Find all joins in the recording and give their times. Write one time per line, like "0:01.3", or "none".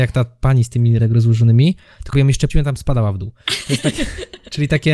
0:01.0
0:02.1
0:02.5